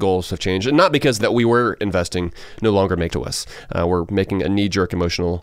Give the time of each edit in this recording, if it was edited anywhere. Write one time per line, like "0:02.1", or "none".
0:01.2
0:03.1